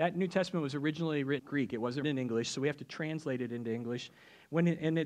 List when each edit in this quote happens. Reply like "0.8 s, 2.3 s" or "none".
1.4 s, 2.0 s